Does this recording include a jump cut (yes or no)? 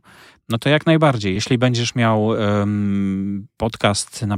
no